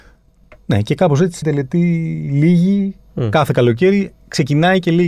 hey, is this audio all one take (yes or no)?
no